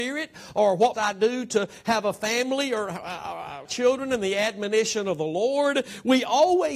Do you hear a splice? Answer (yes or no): yes